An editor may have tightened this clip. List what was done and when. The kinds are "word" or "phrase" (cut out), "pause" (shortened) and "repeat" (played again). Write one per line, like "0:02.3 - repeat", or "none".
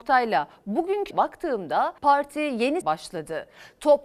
0:01.1 - word
0:02.0 - pause
0:02.8 - phrase

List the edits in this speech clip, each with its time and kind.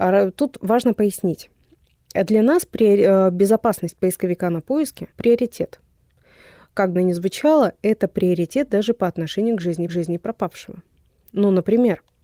0:05.1 - pause
0:07.0 - phrase
0:09.9 - repeat

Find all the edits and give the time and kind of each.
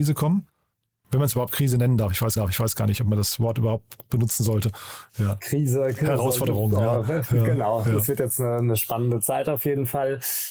0:02.4 - repeat

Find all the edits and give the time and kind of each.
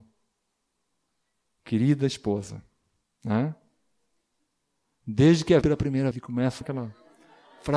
0:05.6 - word
0:06.1 - word
0:06.6 - word

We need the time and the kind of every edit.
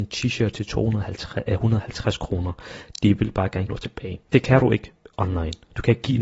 0:03.7 - word
0:04.3 - pause

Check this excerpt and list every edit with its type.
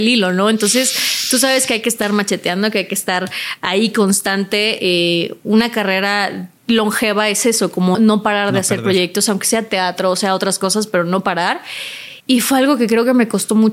0:06.6 - pause
0:07.9 - word
0:12.2 - pause

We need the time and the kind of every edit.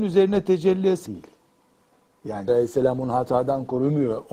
0:01.1 - word
0:02.5 - word

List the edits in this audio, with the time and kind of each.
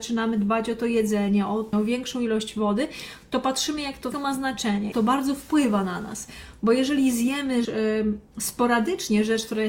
0:01.7 - word
0:04.1 - word
0:04.9 - word
0:07.6 - word

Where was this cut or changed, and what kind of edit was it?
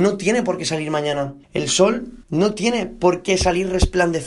0:01.4 - pause
0:02.2 - pause

